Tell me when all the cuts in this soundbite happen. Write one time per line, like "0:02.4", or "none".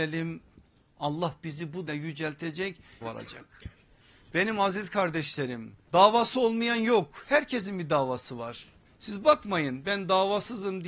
0:01.9
0:03.0
0:05.9
0:08.8